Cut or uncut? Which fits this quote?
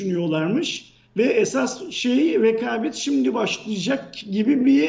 uncut